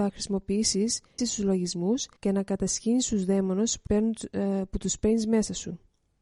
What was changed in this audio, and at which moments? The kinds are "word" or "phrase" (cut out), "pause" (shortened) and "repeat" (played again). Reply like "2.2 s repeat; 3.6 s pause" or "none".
1.2 s phrase; 2.2 s pause; 3.9 s word